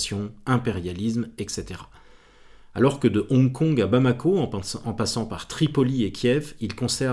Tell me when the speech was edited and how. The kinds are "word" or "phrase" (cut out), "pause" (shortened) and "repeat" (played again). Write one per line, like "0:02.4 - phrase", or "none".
none

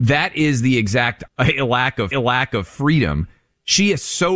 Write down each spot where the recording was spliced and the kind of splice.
0:01.3 - phrase
0:02.1 - repeat

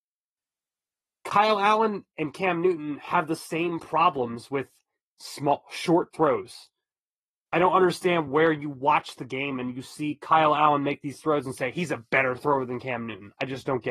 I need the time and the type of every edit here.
none

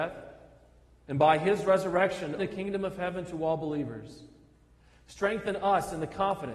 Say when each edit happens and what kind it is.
0:02.4 - word

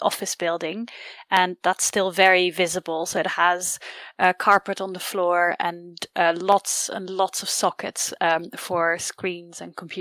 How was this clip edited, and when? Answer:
none

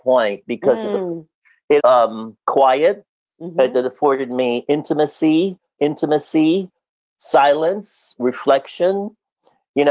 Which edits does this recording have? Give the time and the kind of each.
0:01.8 - phrase
0:02.4 - pause
0:05.8 - repeat

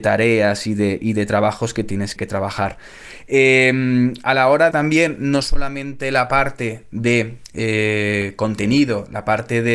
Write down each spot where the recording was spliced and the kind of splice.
0:02.2 - word
0:04.7 - phrase

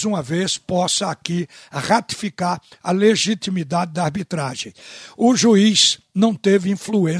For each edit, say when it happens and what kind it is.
none

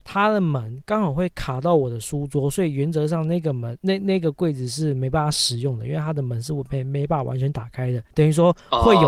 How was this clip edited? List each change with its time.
0:08.1 - pause

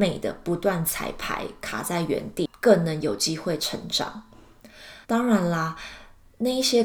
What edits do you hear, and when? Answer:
0:05.0 - pause

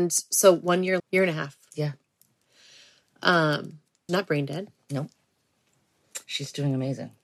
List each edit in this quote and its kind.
0:01.0 - word
0:04.1 - word
0:06.2 - pause

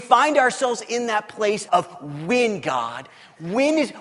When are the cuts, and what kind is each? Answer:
0:01.7 - word

